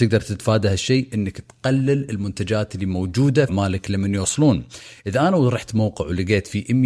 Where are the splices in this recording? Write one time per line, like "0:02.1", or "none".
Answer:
0:03.5